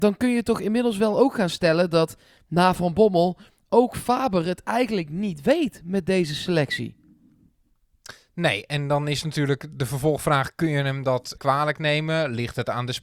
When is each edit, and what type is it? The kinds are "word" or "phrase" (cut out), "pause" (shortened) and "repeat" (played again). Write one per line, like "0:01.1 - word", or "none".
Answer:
0:11.4 - word